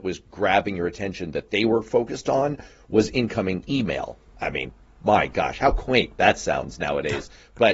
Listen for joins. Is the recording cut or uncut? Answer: uncut